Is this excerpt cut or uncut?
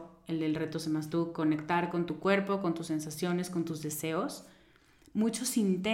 uncut